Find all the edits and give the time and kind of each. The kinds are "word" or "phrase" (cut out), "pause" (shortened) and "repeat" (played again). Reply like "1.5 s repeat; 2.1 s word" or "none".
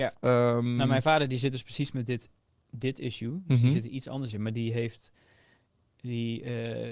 none